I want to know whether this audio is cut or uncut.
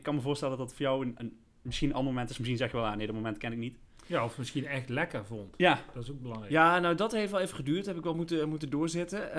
uncut